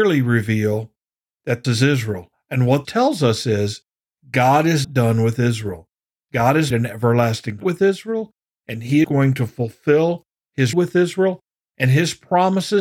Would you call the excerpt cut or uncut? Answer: cut